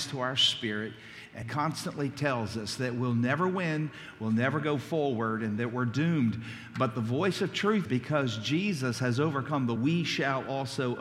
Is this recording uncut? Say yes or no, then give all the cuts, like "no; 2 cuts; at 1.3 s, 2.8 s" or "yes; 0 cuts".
no; 3 cuts; at 1.4 s, 7.8 s, 9.8 s